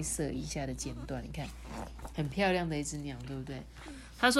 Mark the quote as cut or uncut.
uncut